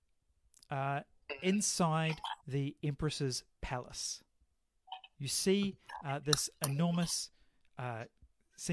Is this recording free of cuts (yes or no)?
no